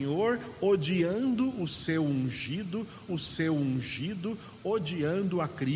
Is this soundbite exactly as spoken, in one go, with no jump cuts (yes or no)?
no